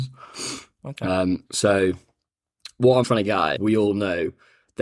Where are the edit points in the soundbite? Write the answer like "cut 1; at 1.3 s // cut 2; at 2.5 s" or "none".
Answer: cut 1; at 1.5 s // cut 2; at 3.0 s // cut 3; at 3.6 s

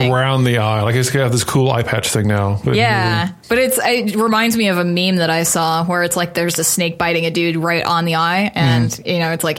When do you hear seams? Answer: cut 1; at 3.4 s

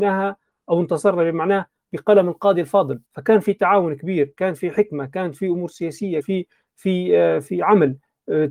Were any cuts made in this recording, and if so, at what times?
cut 1; at 3.1 s // cut 2; at 6.2 s

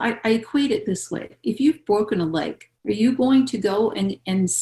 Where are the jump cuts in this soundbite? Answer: cut 1; at 2.8 s

